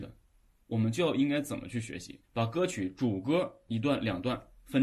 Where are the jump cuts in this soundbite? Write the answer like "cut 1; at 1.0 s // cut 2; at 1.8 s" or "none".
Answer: cut 1; at 2.2 s